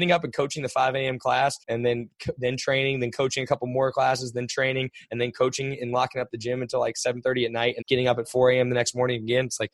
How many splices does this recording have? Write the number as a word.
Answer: two